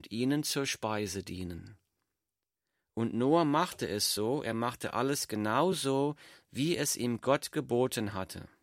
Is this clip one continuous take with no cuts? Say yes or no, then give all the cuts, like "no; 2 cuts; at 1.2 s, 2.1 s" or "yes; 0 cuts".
yes; 0 cuts